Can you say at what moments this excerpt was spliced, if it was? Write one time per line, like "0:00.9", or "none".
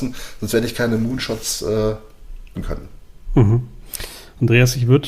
0:02.5